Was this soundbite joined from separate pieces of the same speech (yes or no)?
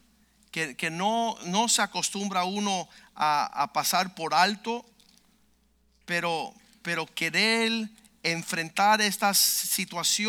no